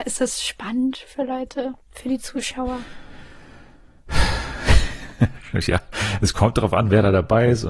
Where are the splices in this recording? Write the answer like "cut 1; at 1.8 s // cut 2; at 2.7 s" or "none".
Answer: cut 1; at 1.8 s